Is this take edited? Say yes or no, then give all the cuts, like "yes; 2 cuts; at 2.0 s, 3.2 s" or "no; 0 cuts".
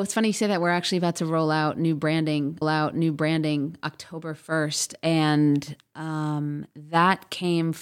yes; 1 cut; at 2.6 s